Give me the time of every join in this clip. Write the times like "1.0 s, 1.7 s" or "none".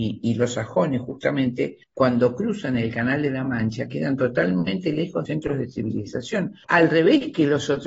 1.8 s, 5.3 s, 6.6 s